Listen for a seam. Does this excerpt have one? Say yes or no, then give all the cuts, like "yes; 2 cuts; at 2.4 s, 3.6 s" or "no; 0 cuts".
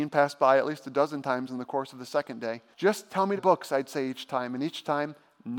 yes; 2 cuts; at 2.7 s, 3.4 s